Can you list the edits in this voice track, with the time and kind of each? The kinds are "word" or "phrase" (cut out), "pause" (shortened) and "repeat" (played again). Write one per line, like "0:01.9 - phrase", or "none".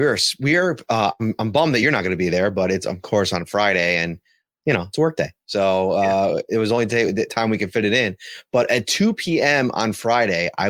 none